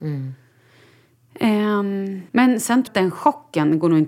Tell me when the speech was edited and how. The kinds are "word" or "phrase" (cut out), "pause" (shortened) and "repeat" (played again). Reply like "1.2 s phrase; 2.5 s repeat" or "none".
2.3 s pause; 2.9 s word

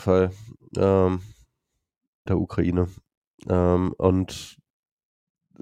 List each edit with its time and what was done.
2.3 s word

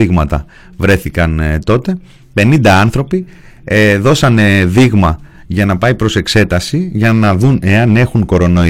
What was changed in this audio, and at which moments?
none

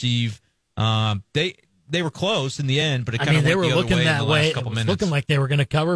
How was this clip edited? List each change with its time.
none

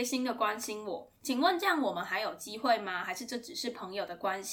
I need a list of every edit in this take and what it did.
1.2 s pause

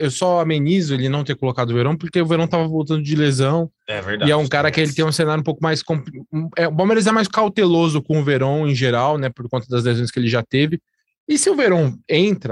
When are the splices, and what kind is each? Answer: none

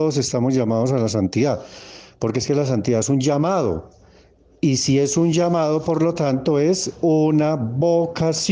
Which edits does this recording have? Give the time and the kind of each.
none

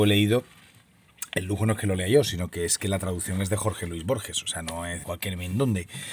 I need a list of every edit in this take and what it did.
5.0 s word

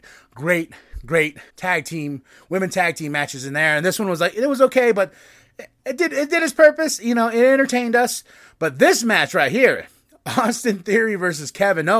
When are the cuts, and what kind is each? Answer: 1.5 s pause; 5.8 s pause

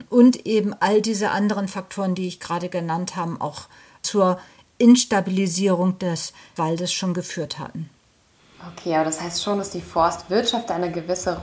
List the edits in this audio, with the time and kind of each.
none

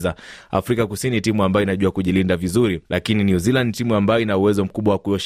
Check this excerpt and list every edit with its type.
2.8 s pause

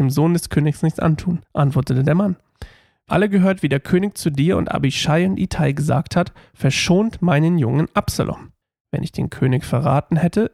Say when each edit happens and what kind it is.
1.4 s pause; 3.1 s word; 8.6 s pause

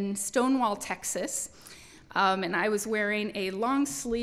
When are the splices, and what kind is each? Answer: none

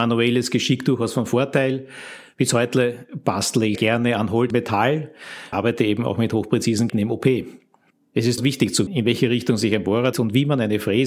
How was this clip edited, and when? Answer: 3.8 s word; 4.5 s word; 5.5 s word; 6.9 s word; 8.4 s word; 8.9 s word; 10.1 s word

